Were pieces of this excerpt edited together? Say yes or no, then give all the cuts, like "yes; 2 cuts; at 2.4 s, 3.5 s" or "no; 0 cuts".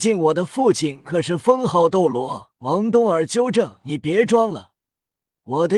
yes; 1 cut; at 2.6 s